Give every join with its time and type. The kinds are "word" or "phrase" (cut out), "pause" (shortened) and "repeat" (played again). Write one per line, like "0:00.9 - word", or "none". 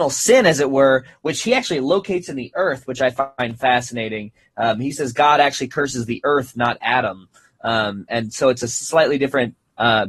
none

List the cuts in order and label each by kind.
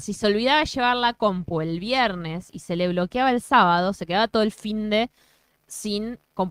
none

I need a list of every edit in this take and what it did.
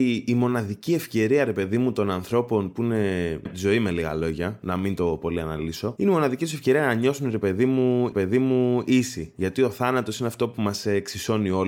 0:03.5 - word
0:08.1 - repeat

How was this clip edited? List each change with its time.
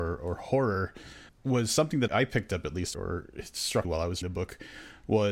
0:01.3 - word
0:02.1 - word
0:02.9 - word
0:03.8 - word
0:04.2 - word

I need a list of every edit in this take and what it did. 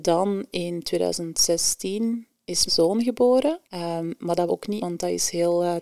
0:02.7 - word
0:03.6 - pause
0:04.5 - word
0:04.8 - word

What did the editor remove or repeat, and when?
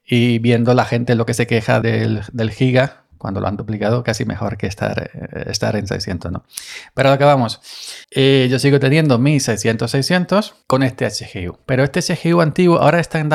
0:01.8 - word
0:08.0 - pause
0:10.6 - pause

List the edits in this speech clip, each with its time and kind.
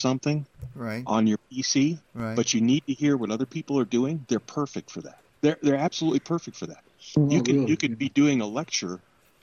0:02.0 - pause
0:05.3 - pause

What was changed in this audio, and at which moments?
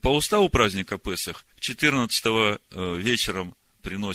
0:01.5 - pause

